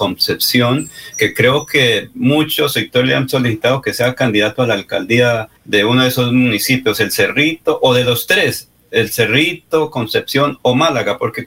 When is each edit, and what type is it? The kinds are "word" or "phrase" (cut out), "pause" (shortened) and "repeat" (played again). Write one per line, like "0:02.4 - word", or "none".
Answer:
0:05.6 - pause